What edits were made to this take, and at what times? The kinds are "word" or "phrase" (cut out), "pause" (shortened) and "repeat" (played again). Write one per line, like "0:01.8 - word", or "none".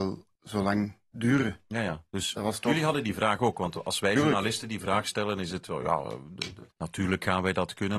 0:06.7 - pause